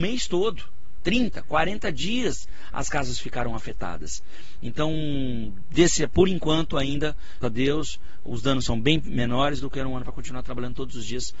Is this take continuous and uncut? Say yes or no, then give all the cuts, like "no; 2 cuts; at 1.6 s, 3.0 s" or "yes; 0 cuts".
no; 2 cuts; at 7.4 s, 10.0 s